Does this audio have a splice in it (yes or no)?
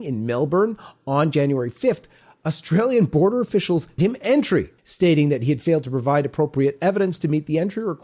yes